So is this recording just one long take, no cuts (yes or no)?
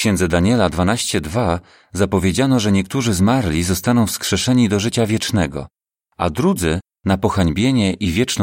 yes